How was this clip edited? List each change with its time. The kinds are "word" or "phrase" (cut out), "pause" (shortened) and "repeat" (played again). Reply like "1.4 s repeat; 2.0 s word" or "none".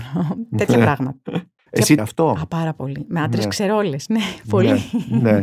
1.6 s pause; 2.0 s phrase